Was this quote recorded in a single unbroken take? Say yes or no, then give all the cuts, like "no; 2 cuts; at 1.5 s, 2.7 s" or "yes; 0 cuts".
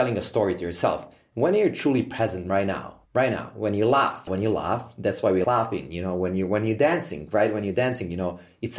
no; 3 cuts; at 3.1 s, 4.3 s, 5.4 s